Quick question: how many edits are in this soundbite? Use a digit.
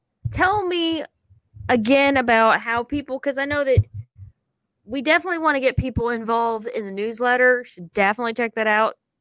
0